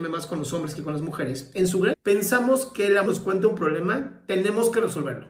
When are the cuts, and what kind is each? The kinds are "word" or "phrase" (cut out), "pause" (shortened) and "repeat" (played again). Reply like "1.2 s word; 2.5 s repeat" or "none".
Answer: 1.9 s word; 3.1 s phrase